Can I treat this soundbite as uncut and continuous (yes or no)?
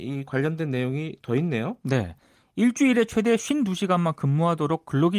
yes